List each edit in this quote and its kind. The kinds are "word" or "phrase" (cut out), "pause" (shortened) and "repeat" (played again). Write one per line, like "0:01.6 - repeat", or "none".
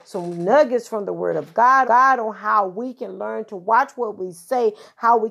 0:01.8 - repeat